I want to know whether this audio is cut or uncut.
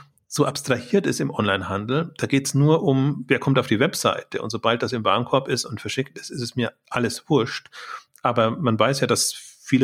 uncut